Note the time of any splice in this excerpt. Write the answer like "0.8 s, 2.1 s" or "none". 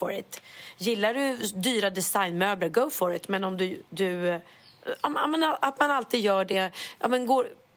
none